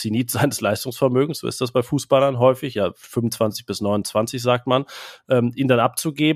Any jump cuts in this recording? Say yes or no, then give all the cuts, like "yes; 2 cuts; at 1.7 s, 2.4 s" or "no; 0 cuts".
no; 0 cuts